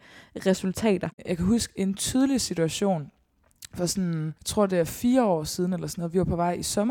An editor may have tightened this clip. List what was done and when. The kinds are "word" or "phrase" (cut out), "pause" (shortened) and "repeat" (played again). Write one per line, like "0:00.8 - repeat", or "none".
0:04.4 - pause